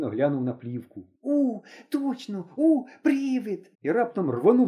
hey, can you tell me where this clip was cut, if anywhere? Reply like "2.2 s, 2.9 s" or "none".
1.2 s, 3.7 s